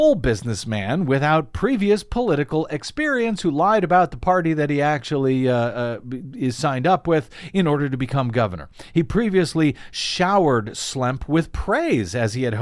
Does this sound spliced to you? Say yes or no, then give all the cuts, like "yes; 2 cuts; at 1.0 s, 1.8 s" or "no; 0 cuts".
no; 0 cuts